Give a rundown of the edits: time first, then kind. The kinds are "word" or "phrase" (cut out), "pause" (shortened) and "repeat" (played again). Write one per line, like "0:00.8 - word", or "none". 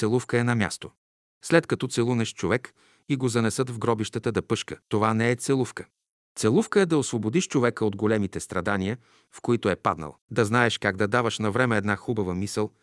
0:04.8 - pause
0:10.2 - pause